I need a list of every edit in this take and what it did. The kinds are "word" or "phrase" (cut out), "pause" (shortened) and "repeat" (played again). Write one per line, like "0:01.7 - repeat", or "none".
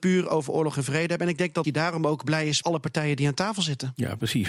0:01.6 - word
0:02.6 - phrase